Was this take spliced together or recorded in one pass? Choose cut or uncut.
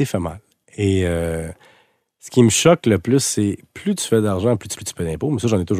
cut